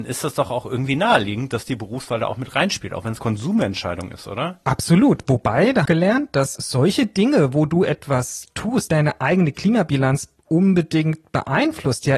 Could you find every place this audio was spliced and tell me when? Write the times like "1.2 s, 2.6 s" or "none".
3.2 s, 5.8 s, 6.5 s, 8.9 s